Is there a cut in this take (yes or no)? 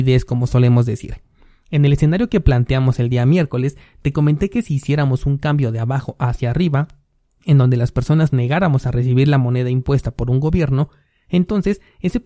yes